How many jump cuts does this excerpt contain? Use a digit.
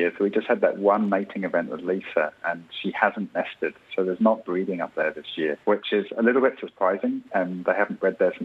1